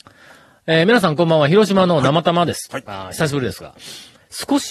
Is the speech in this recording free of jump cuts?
yes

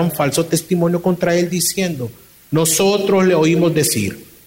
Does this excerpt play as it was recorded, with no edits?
yes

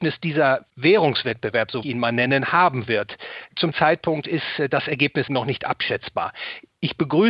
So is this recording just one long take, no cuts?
no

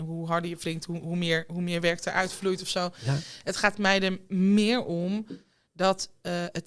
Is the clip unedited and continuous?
yes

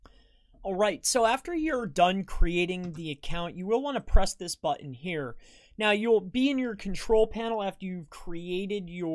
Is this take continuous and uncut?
yes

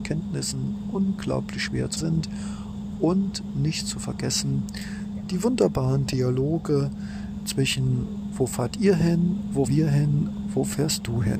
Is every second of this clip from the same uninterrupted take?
no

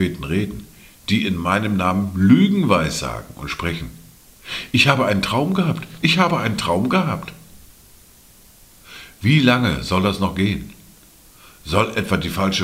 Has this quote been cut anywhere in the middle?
no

